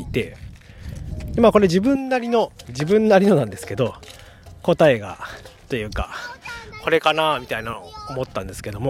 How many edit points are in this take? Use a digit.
1